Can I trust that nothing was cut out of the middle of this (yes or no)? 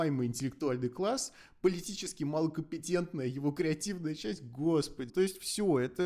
no